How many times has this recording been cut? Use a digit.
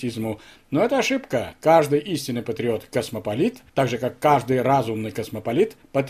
1